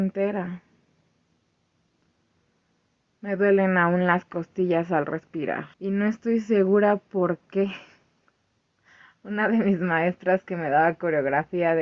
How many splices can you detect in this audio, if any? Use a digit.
1